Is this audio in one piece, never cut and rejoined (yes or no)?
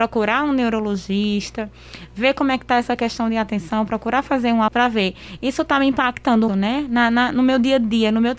no